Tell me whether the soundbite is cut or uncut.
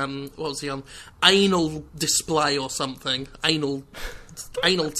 uncut